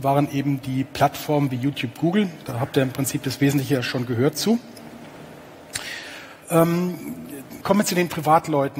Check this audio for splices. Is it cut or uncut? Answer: cut